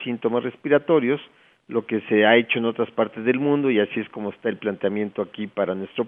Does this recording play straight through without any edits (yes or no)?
yes